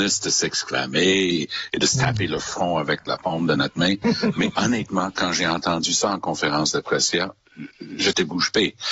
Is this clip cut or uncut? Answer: uncut